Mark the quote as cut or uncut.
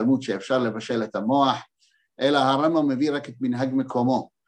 uncut